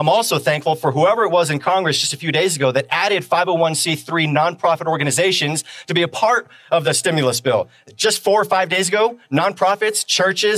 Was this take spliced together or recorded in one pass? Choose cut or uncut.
uncut